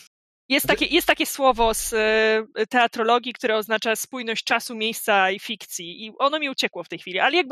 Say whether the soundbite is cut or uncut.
uncut